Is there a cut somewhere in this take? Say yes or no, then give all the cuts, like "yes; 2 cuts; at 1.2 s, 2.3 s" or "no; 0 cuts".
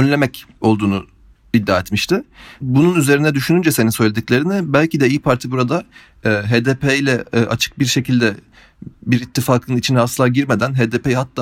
no; 0 cuts